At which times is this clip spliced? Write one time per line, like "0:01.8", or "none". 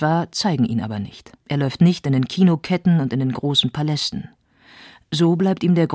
0:01.4